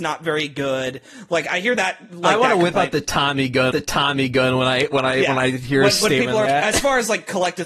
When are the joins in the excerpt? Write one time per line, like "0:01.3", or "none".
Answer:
0:03.7
0:06.5